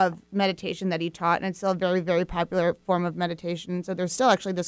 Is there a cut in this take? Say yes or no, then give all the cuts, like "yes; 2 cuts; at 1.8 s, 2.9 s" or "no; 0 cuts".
no; 0 cuts